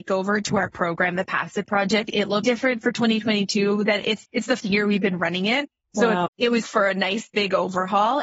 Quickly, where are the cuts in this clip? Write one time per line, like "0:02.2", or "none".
0:02.4
0:04.2
0:04.6
0:06.3
0:06.6

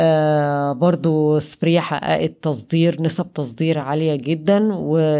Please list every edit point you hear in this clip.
none

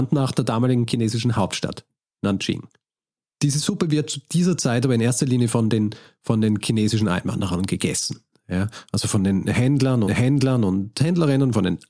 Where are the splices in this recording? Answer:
0:10.0

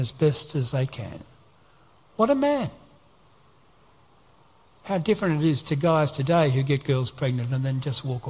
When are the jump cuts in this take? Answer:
none

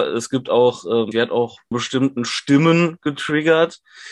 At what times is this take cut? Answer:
0:01.1
0:01.7

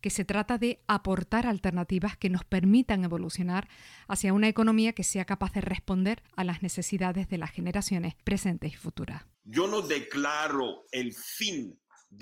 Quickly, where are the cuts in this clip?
0:06.3
0:08.2
0:09.3

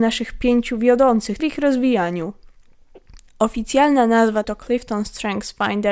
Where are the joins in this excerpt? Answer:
0:01.4
0:04.4

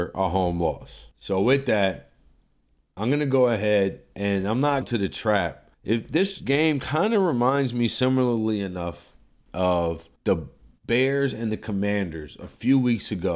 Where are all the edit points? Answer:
0:04.8
0:05.7
0:10.2

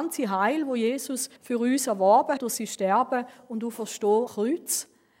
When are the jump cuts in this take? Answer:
0:01.4
0:02.4
0:04.3

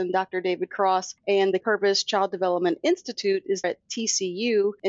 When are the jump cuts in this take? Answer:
0:01.6
0:03.6

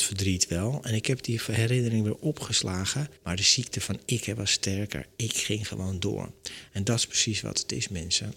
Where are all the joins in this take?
0:03.2

